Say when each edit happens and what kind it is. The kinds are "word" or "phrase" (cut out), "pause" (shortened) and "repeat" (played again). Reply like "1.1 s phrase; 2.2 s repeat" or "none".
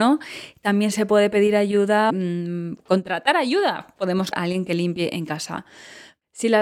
2.1 s phrase; 4.3 s word